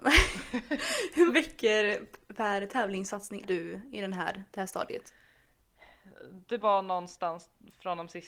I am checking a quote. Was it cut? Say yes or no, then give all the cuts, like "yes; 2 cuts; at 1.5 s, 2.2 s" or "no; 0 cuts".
yes; 3 cuts; at 1.3 s, 3.4 s, 6.6 s